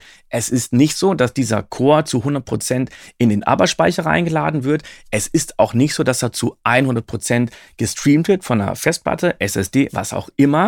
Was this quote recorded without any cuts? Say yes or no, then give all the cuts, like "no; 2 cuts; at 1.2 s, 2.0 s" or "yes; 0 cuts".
yes; 0 cuts